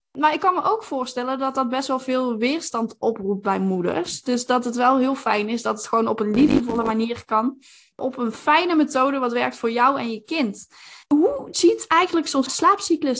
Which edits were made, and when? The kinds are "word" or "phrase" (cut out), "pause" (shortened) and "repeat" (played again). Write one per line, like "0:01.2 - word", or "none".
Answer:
0:11.0 - pause